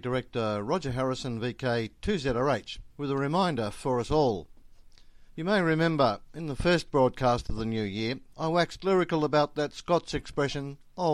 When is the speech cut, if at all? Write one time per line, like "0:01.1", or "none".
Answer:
0:02.9
0:05.3
0:08.3